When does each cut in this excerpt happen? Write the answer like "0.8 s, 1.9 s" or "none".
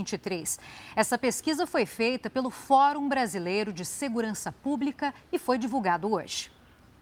none